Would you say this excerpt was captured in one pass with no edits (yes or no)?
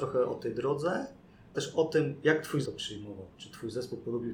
no